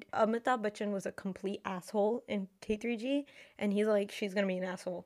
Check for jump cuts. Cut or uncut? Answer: uncut